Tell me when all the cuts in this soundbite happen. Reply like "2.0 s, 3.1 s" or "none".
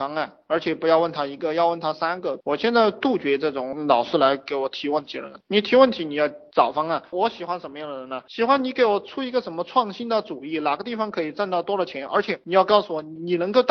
7.1 s